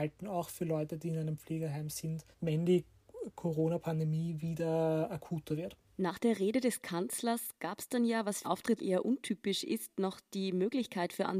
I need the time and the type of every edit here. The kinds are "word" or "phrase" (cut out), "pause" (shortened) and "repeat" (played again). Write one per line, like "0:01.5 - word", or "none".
0:02.3 - pause
0:05.8 - pause
0:08.4 - phrase
0:08.8 - word

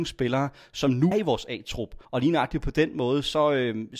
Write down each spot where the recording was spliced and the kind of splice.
0:01.1 - word
0:02.0 - pause

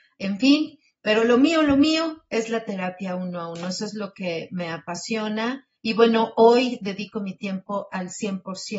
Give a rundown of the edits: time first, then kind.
0:05.8 - pause

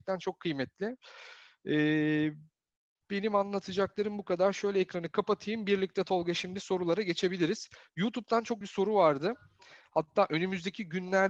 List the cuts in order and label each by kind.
0:08.6 - word

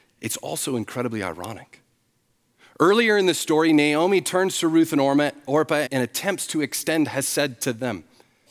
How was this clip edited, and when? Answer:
0:05.9 - word

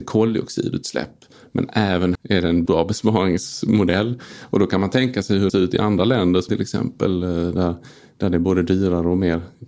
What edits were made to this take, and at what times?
0:02.1 - word
0:02.7 - word
0:05.5 - word
0:06.5 - word

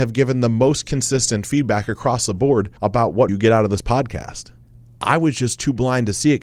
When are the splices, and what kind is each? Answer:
0:02.8 - pause
0:03.3 - word
0:04.6 - pause

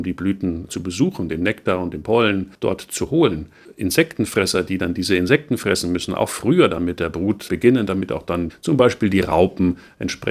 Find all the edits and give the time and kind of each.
none

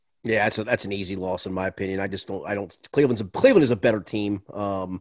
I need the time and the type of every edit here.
none

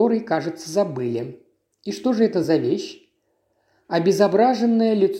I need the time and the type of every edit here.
none

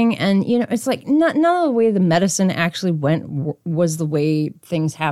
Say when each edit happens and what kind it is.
none

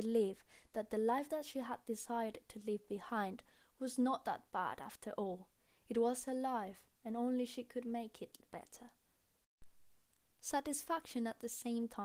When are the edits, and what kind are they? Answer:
none

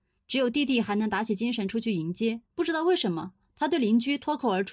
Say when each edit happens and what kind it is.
0:02.5 - pause

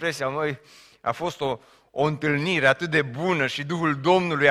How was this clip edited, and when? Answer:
none

